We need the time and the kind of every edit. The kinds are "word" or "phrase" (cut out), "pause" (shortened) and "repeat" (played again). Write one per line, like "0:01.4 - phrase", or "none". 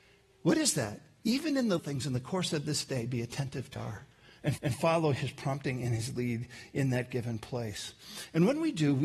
0:01.8 - word
0:03.8 - phrase
0:04.6 - repeat

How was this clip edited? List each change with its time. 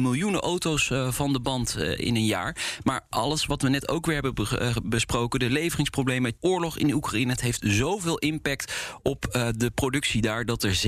0:06.4 - word

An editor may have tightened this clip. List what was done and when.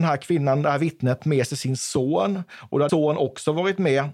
0:01.2 - word
0:02.9 - word

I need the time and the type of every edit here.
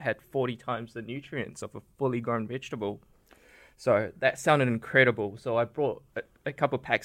none

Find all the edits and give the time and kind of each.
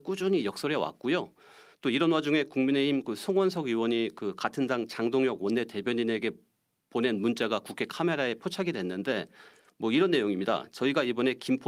none

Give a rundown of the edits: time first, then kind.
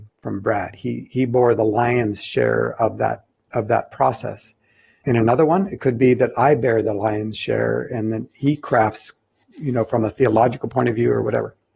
none

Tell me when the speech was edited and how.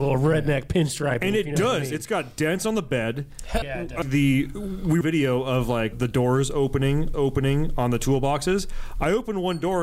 0:03.6 - word
0:04.0 - word
0:05.0 - phrase
0:05.9 - phrase
0:07.1 - repeat

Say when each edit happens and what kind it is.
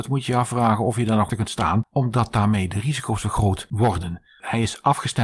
0:01.3 - word

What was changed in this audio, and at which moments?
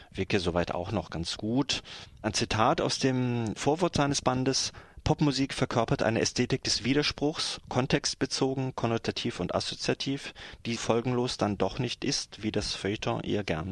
0:10.8 - word

